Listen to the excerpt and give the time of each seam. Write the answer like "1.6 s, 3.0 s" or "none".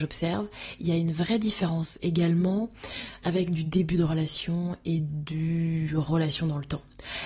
3.2 s